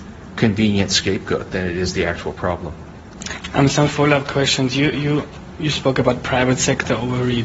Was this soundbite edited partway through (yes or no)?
no